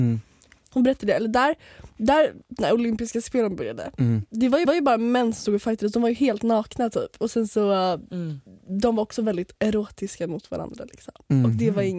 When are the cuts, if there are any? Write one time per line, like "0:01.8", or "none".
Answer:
0:04.7
0:09.6